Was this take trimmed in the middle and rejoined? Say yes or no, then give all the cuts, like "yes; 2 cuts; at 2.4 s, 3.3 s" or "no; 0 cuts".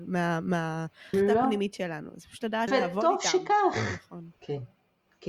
yes; 2 cuts; at 1.1 s, 2.7 s